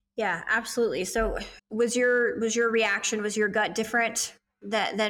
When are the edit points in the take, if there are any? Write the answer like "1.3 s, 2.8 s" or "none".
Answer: 1.6 s